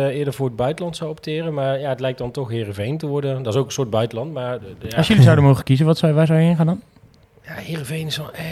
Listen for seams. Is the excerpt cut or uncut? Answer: uncut